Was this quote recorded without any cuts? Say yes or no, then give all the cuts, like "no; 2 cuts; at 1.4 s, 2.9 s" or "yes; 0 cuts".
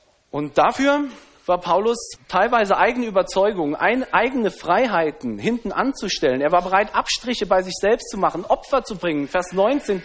no; 1 cut; at 2.2 s